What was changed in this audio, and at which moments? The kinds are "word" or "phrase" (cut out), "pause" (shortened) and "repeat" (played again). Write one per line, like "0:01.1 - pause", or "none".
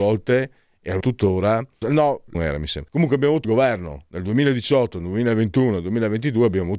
0:01.0 - word
0:01.8 - phrase
0:02.3 - phrase
0:02.9 - pause
0:03.4 - phrase